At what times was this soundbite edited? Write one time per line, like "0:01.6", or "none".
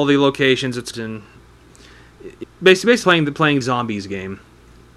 0:00.9
0:02.4
0:03.0
0:03.6